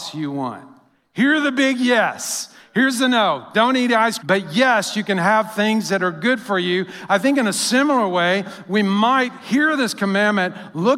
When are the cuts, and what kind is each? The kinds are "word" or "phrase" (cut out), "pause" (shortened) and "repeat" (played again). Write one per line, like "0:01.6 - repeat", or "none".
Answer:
0:04.2 - word